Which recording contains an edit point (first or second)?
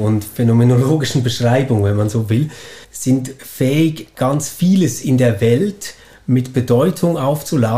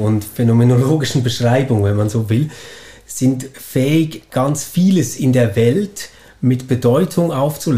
first